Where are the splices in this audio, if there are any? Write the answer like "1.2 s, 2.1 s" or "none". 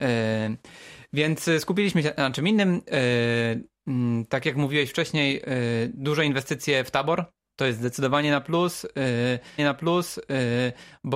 9.6 s